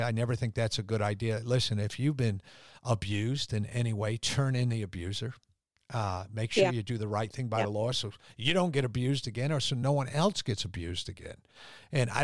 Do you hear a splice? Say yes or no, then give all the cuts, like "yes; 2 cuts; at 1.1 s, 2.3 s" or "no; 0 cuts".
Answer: no; 0 cuts